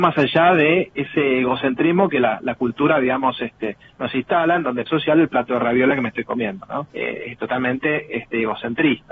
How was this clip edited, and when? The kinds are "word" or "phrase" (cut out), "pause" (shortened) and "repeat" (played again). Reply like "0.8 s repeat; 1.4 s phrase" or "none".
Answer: 0.9 s word; 4.9 s phrase; 6.9 s pause